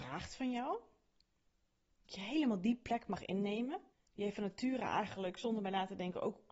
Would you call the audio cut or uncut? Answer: cut